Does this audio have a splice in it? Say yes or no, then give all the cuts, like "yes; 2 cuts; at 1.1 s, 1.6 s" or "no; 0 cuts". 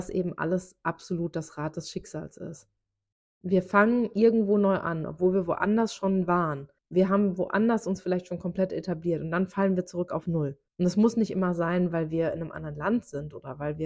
yes; 3 cuts; at 3.1 s, 6.8 s, 10.7 s